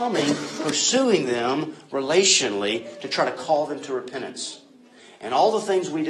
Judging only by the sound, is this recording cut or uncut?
uncut